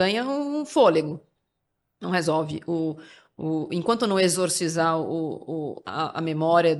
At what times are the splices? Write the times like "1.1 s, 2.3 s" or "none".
none